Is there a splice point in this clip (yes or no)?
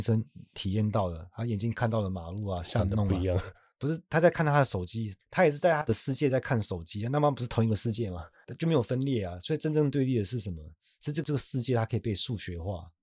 no